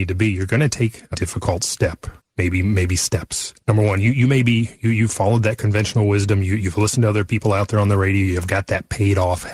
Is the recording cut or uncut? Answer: cut